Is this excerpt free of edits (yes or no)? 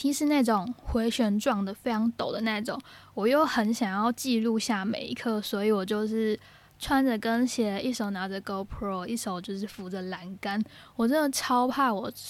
yes